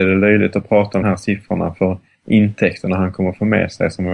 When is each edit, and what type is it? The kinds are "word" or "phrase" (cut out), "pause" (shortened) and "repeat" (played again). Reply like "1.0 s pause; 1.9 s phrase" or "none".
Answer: 1.0 s word